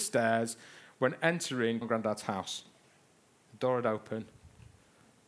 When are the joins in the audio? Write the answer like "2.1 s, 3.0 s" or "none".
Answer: 1.8 s